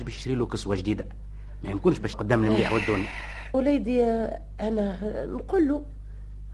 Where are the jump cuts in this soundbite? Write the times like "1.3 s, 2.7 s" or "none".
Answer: 2.1 s, 3.5 s